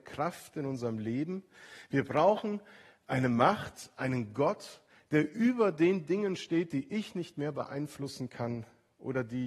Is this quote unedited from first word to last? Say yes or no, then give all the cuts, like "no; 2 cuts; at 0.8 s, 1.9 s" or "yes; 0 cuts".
yes; 0 cuts